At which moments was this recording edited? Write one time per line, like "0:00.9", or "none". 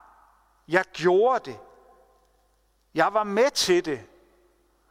none